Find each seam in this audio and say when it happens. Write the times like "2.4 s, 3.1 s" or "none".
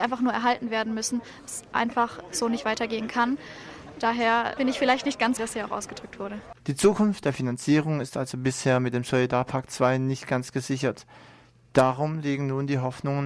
4.6 s, 5.4 s, 6.6 s